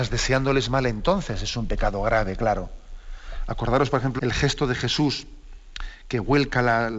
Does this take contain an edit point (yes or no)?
yes